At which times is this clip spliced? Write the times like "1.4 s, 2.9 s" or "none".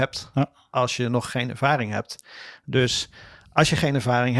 none